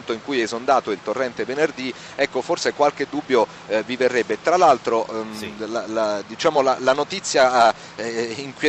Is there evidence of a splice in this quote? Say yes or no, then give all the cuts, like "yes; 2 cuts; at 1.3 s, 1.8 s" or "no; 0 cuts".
no; 0 cuts